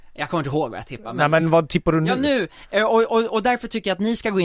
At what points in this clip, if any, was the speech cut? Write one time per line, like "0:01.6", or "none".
none